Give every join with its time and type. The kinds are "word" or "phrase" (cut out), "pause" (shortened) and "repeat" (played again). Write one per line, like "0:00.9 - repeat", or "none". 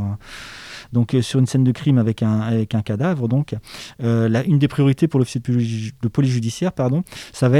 none